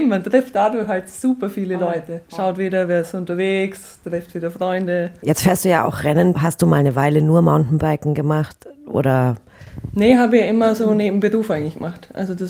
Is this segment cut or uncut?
cut